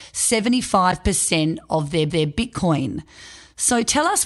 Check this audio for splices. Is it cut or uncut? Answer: cut